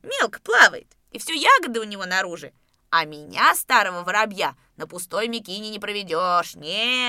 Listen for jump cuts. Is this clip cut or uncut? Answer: uncut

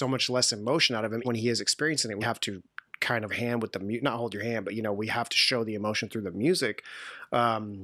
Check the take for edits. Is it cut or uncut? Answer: cut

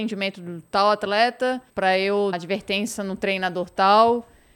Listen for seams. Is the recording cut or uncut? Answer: cut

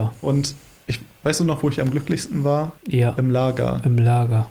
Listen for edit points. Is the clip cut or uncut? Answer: cut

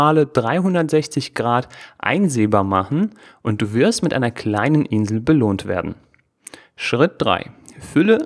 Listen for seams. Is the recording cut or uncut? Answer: uncut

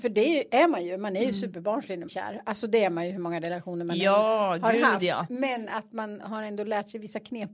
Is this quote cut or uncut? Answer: cut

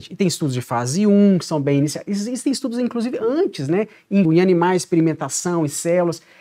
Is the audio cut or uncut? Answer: cut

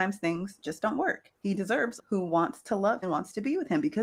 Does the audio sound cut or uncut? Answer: cut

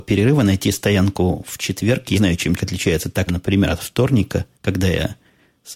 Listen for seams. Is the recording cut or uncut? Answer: cut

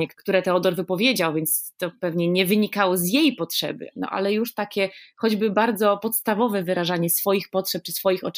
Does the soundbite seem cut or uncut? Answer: uncut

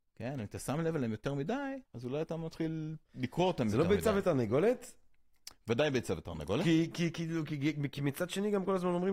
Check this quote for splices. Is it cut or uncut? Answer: cut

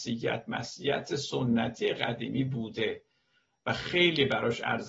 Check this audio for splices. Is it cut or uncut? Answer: uncut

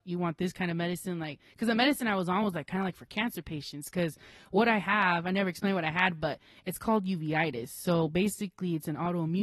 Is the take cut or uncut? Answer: uncut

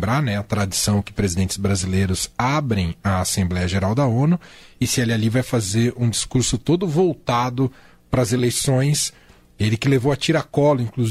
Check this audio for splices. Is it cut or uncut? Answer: uncut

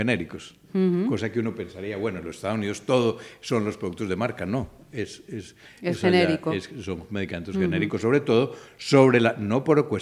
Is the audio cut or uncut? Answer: uncut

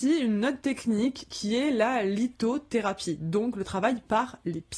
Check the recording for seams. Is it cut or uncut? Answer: uncut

